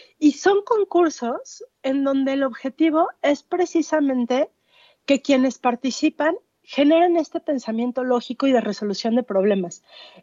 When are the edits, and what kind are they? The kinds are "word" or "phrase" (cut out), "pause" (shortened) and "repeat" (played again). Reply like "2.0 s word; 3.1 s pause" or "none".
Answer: none